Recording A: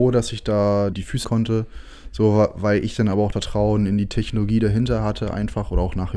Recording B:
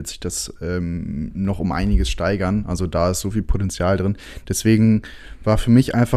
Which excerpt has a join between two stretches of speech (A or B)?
A